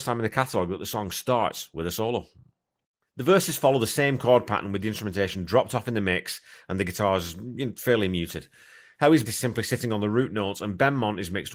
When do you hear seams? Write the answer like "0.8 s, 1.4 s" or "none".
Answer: 9.3 s